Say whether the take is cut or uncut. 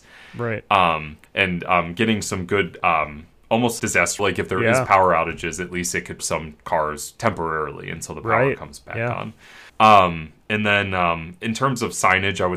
cut